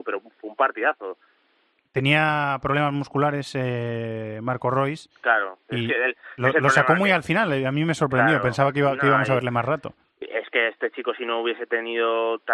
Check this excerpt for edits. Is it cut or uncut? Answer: uncut